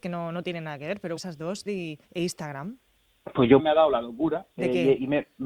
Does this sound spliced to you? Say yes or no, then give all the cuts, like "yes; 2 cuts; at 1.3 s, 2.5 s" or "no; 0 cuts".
yes; 5 cuts; at 1.2 s, 1.7 s, 2.0 s, 3.6 s, 4.5 s